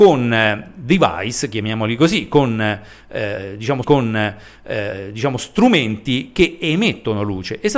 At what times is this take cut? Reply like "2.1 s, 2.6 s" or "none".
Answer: 3.8 s